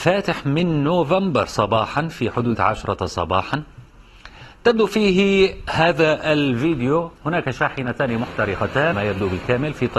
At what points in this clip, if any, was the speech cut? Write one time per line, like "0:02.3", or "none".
0:02.5
0:07.1
0:08.9